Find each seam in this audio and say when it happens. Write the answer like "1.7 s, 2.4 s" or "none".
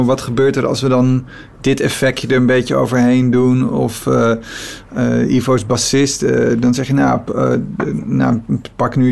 none